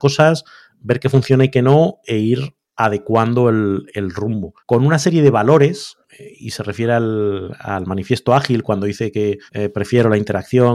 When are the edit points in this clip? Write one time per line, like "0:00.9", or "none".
0:04.6
0:06.0
0:09.5